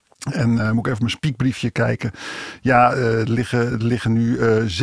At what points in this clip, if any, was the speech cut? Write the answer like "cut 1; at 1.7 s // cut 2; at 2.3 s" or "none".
none